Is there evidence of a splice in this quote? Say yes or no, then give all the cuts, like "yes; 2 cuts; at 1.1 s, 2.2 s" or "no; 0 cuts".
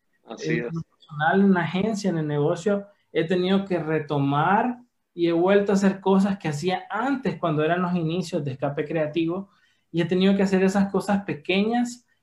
no; 0 cuts